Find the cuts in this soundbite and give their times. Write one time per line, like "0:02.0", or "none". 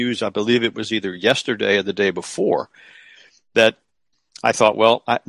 none